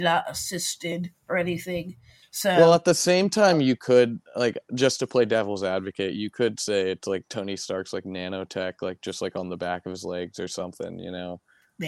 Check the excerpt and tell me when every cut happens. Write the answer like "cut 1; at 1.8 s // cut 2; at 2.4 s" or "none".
none